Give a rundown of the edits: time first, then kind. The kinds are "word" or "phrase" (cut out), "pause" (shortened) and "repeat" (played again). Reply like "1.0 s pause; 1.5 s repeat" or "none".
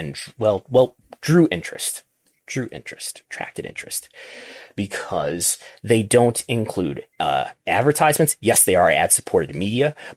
7.1 s pause